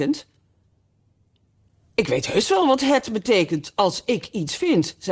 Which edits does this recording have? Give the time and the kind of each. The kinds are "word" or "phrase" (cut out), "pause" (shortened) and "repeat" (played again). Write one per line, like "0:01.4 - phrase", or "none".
none